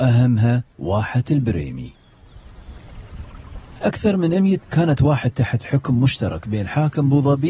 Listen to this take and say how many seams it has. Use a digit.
3